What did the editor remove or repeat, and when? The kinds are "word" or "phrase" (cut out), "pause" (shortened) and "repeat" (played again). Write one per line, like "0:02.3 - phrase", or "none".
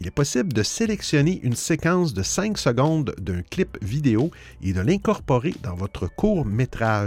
none